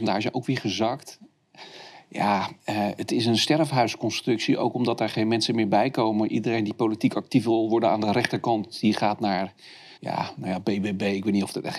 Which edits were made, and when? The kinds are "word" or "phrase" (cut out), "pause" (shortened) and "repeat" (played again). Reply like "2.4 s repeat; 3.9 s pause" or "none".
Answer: 2.6 s pause; 10.0 s pause